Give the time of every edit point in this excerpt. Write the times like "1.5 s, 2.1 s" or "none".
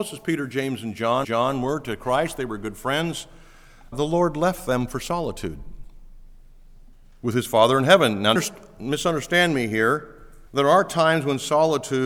1.2 s, 3.9 s, 6.9 s, 8.4 s, 10.5 s